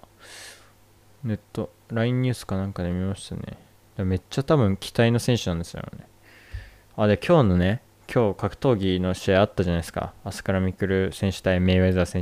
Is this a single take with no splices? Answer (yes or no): yes